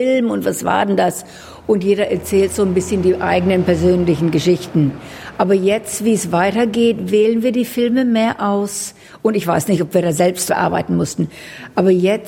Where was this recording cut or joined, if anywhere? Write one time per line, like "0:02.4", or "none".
0:10.5